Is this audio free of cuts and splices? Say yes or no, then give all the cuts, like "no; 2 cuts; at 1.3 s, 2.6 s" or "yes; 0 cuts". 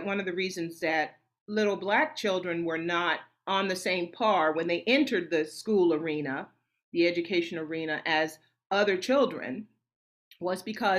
yes; 0 cuts